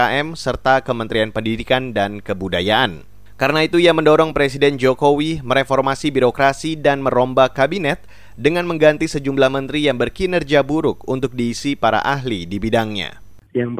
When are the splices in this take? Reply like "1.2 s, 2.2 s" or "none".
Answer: none